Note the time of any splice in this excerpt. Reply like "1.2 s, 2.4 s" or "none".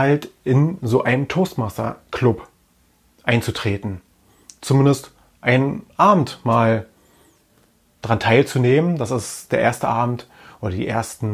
none